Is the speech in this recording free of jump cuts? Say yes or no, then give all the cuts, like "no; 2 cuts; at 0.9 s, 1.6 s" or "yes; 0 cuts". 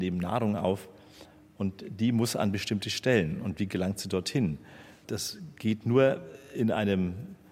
yes; 0 cuts